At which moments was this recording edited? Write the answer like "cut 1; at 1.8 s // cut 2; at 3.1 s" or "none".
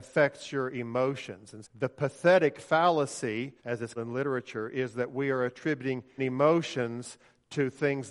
cut 1; at 1.6 s // cut 2; at 3.6 s // cut 3; at 4.0 s // cut 4; at 6.2 s